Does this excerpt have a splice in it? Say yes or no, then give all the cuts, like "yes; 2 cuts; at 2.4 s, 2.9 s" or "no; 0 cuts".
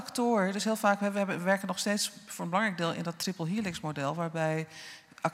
no; 0 cuts